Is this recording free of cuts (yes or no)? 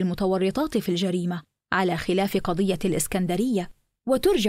yes